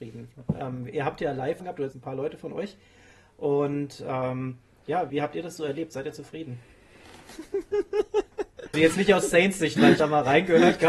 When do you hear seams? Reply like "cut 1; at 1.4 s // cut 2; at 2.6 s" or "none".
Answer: cut 1; at 1.6 s // cut 2; at 1.9 s // cut 3; at 5.1 s // cut 4; at 8.7 s // cut 5; at 10.0 s